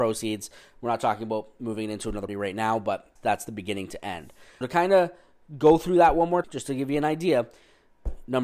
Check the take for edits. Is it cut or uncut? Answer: cut